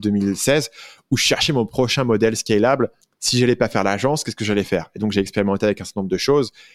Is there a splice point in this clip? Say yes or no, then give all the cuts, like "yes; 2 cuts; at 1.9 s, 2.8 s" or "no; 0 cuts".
yes; 1 cut; at 3.0 s